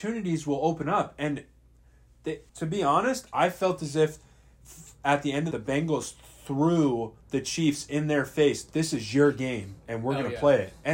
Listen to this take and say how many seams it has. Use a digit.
3